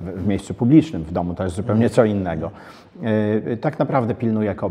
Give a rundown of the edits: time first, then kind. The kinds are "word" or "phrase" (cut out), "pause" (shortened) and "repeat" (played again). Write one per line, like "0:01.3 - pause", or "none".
none